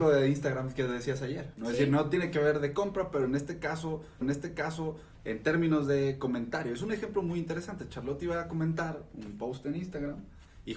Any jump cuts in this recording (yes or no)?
yes